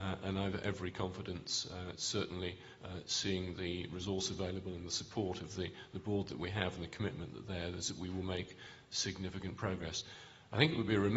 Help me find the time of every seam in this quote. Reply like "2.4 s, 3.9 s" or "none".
none